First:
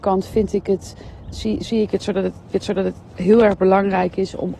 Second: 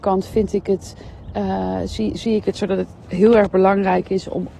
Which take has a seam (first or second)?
first